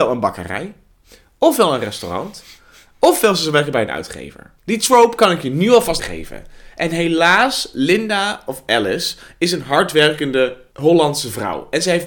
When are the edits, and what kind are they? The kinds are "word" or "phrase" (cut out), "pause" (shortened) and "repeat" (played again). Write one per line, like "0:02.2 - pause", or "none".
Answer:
0:04.6 - pause
0:06.0 - word